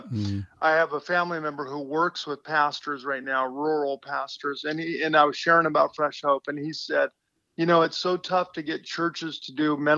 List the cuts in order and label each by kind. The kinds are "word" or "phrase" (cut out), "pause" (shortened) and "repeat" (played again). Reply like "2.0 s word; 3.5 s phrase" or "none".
none